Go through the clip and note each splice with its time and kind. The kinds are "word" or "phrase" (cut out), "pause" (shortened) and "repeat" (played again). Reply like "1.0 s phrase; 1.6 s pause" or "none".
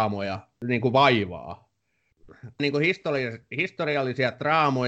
2.6 s word